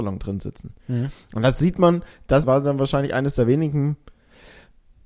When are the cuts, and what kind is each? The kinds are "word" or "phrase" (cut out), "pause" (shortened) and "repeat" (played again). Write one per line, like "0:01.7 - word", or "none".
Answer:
0:02.4 - word